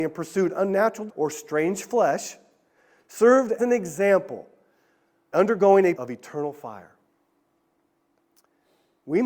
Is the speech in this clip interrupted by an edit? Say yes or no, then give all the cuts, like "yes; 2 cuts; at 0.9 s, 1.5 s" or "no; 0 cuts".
yes; 4 cuts; at 1.1 s, 3.6 s, 5.3 s, 5.9 s